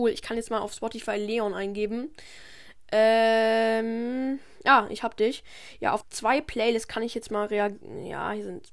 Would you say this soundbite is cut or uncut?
cut